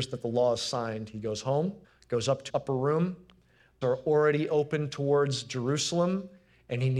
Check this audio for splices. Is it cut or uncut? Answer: cut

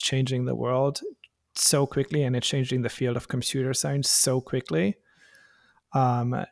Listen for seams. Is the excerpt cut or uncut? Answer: uncut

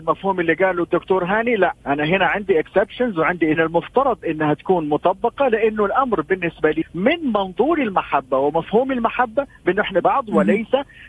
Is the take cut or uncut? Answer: cut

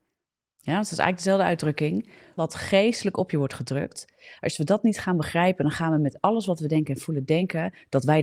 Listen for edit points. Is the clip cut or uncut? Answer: cut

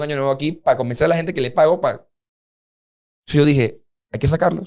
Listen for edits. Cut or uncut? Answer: uncut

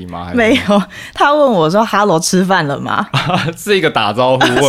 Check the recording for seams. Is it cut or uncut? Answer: uncut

